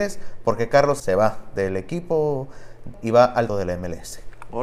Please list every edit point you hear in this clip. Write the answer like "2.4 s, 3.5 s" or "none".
1.0 s, 2.9 s, 3.5 s